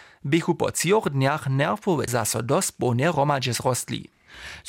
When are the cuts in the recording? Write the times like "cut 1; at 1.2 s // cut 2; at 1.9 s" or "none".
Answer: cut 1; at 2.1 s